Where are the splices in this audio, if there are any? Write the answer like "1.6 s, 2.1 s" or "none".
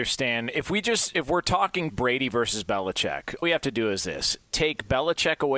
1.9 s, 3.4 s